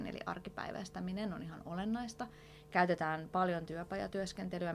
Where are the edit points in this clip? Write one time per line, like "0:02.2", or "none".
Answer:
none